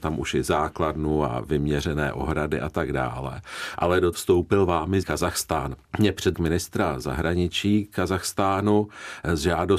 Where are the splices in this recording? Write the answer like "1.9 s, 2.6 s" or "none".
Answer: 4.1 s, 5.0 s, 5.8 s, 6.3 s